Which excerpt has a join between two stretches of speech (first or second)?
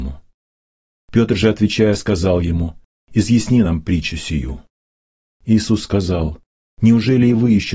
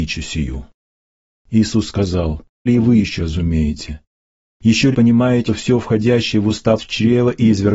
second